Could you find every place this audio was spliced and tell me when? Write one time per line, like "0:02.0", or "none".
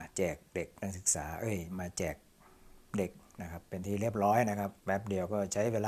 0:04.8